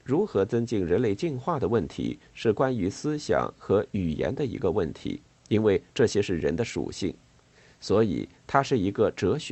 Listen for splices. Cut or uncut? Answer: uncut